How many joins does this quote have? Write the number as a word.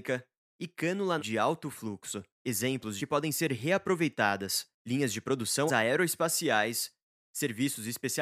five